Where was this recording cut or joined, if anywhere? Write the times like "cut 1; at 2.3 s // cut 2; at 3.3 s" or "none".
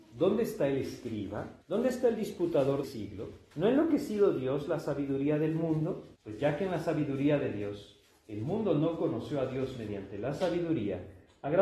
cut 1; at 1.6 s // cut 2; at 2.8 s // cut 3; at 3.5 s // cut 4; at 6.2 s